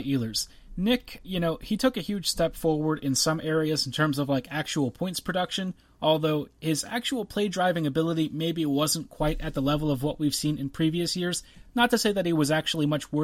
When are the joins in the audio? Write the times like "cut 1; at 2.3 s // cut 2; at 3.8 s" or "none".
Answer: none

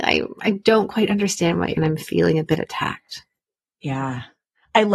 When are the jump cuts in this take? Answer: cut 1; at 1.8 s

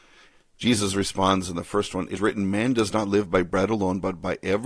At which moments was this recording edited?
cut 1; at 2.2 s

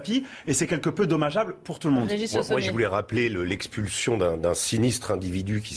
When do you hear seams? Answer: none

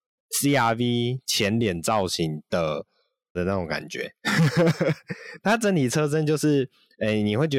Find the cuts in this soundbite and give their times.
cut 1; at 3.4 s // cut 2; at 5.4 s

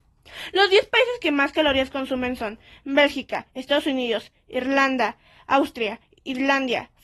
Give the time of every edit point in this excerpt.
none

